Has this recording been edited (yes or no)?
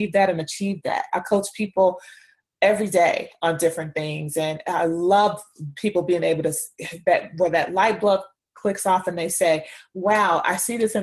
no